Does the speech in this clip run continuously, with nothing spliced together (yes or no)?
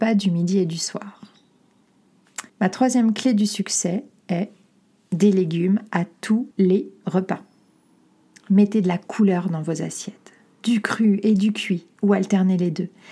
no